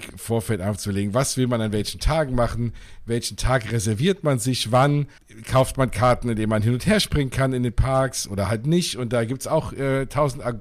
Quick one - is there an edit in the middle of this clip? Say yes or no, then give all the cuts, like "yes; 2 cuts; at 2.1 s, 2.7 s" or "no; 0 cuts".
yes; 1 cut; at 5.2 s